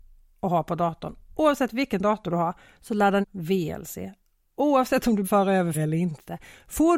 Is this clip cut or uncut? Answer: cut